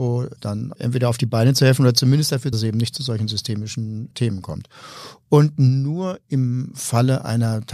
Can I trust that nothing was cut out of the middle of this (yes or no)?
no